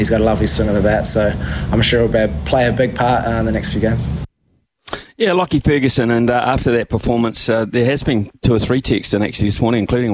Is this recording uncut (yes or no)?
yes